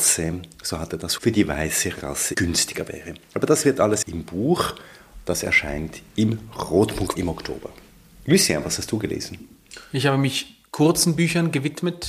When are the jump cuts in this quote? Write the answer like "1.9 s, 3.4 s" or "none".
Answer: 1.2 s, 2.3 s, 4.0 s, 7.1 s